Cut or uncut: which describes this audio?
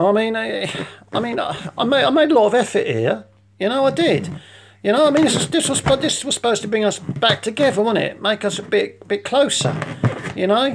uncut